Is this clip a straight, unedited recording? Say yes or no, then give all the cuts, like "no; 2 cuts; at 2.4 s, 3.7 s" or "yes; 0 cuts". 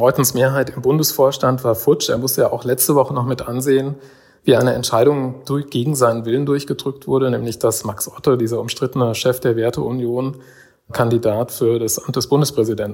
yes; 0 cuts